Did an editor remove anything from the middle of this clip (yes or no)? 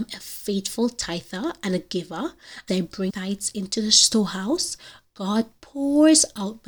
yes